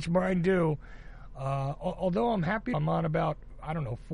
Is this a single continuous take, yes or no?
no